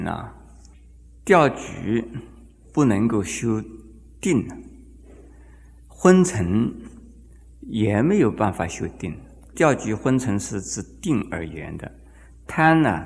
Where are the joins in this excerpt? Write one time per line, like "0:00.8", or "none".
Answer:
none